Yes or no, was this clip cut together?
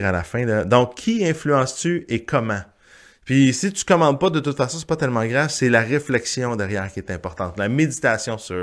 no